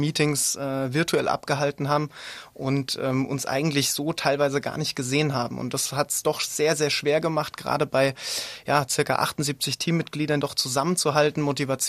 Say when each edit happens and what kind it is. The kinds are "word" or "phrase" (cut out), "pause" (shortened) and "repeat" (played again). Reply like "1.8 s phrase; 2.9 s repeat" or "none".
10.4 s phrase